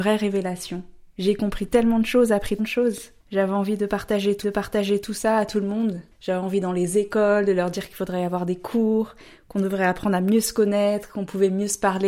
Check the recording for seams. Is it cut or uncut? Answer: cut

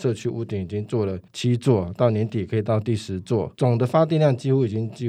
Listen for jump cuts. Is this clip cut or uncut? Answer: cut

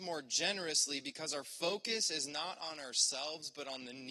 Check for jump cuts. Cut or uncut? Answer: uncut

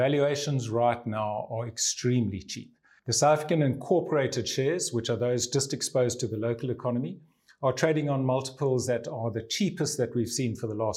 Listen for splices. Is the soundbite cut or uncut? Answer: uncut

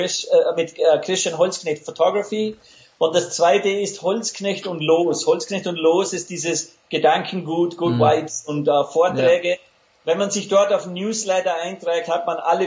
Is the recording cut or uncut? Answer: uncut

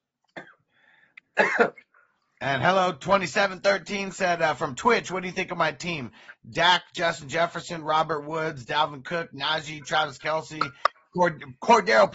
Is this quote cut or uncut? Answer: uncut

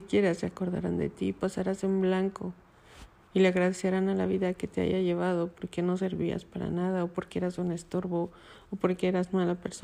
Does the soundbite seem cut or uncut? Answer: uncut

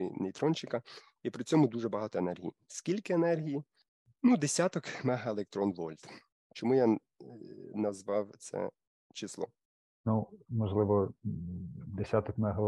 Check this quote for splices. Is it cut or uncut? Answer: uncut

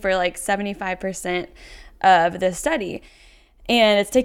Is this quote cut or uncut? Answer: uncut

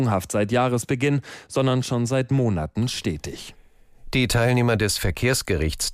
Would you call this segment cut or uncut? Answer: uncut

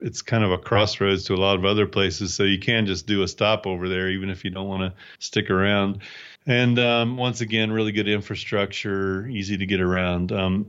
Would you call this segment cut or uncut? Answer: cut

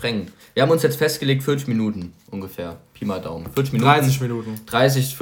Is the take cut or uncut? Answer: uncut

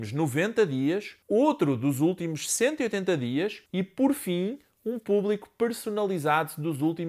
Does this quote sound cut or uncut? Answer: cut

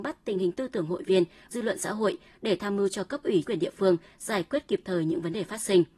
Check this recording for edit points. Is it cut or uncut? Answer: cut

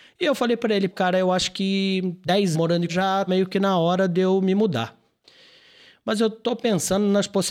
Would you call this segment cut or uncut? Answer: cut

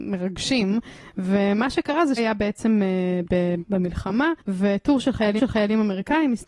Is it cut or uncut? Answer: cut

